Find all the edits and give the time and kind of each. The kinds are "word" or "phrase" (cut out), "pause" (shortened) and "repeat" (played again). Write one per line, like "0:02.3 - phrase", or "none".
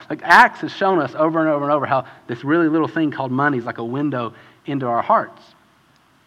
none